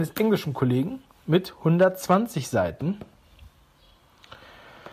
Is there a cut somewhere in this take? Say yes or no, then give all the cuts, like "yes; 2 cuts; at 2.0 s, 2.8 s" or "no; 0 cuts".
no; 0 cuts